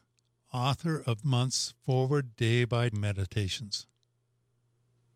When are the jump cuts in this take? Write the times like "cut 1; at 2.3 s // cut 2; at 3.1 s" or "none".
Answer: cut 1; at 1.2 s // cut 2; at 2.9 s

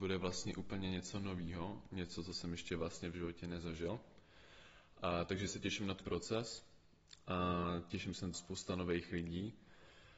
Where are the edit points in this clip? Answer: cut 1; at 5.5 s // cut 2; at 6.0 s // cut 3; at 8.3 s

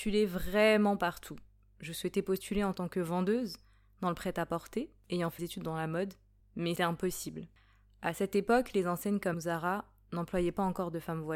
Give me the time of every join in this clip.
cut 1; at 5.4 s // cut 2; at 6.8 s // cut 3; at 9.3 s

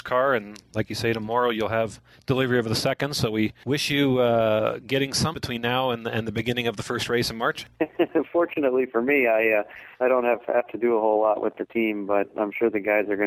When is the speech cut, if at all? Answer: cut 1; at 2.1 s // cut 2; at 5.3 s // cut 3; at 7.7 s // cut 4; at 9.9 s

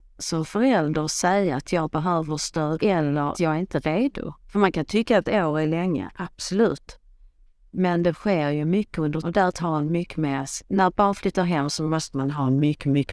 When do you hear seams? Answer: cut 1; at 2.8 s // cut 2; at 3.3 s // cut 3; at 4.4 s // cut 4; at 7.3 s // cut 5; at 9.2 s // cut 6; at 9.6 s // cut 7; at 10.6 s

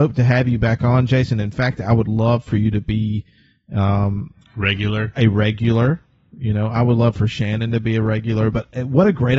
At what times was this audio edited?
none

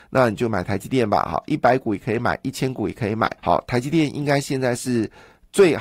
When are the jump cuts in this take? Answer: cut 1; at 3.4 s

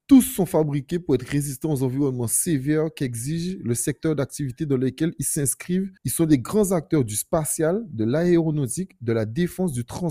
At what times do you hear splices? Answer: cut 1; at 6.0 s

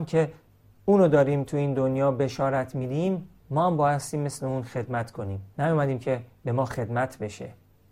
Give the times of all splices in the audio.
cut 1; at 5.5 s

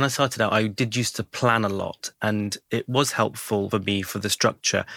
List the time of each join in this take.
cut 1; at 3.7 s

